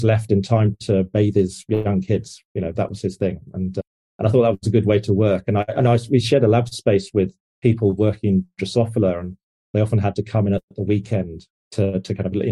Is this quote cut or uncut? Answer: uncut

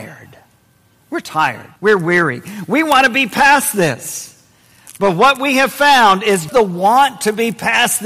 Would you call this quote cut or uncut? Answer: cut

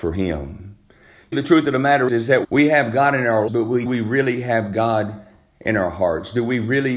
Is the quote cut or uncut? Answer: cut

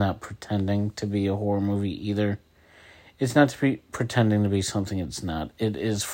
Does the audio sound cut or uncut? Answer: uncut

